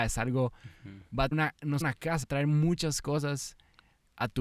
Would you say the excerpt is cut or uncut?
cut